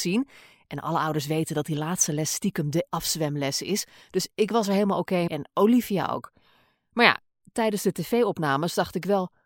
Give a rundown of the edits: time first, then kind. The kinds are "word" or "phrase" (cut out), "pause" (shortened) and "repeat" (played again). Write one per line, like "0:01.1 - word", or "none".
0:02.9 - word
0:05.3 - word